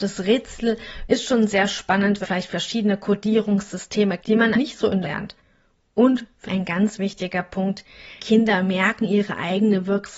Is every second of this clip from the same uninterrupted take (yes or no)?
no